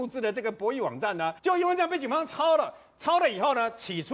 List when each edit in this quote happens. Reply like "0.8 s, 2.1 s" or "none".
1.4 s